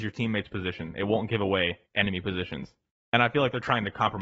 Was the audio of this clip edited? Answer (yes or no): yes